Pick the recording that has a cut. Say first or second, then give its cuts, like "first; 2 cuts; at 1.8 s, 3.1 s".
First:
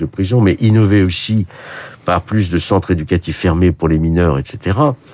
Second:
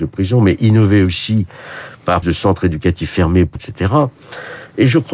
second; 2 cuts; at 2.2 s, 3.6 s